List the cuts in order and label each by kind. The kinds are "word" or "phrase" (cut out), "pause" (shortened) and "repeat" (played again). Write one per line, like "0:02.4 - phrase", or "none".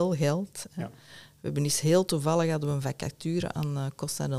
none